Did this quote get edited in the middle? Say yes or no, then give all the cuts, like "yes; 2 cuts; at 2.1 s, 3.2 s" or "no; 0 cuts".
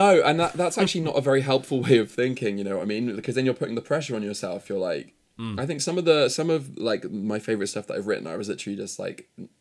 no; 0 cuts